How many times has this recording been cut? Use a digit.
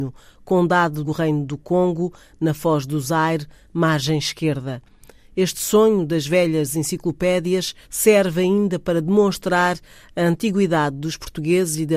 2